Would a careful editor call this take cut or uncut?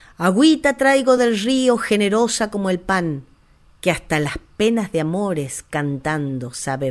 uncut